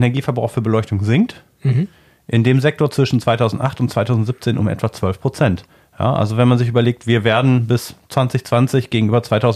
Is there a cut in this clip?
no; 0 cuts

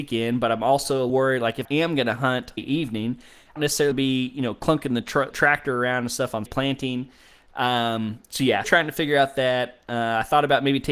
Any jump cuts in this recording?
yes; 8 cuts; at 1.1 s, 1.6 s, 2.6 s, 3.6 s, 3.9 s, 5.3 s, 6.5 s, 8.6 s

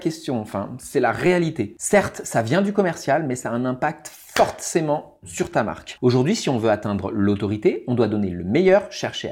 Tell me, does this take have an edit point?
no; 0 cuts

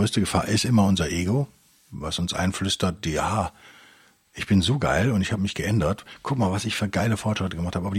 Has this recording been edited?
no; 0 cuts

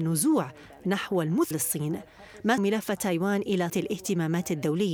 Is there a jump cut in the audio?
yes; 3 cuts; at 1.5 s, 2.6 s, 3.7 s

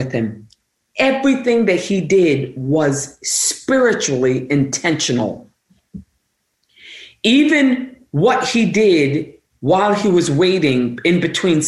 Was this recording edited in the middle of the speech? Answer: no; 0 cuts

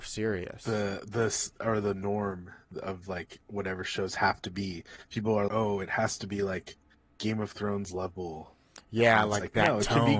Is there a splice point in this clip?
yes; 2 cuts; at 5.5 s, 8.8 s

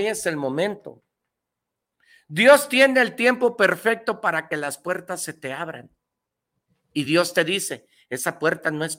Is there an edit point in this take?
no; 0 cuts

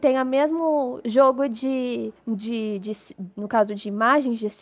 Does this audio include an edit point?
yes; 1 cut; at 2.2 s

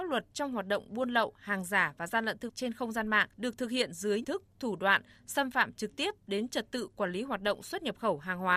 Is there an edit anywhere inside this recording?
yes; 3 cuts; at 2.5 s, 3.3 s, 4.2 s

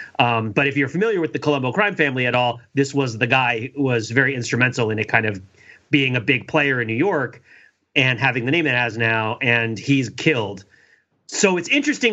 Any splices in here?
no; 0 cuts

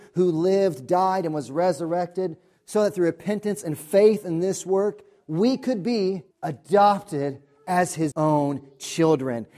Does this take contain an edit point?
yes; 2 cuts; at 6.3 s, 8.1 s

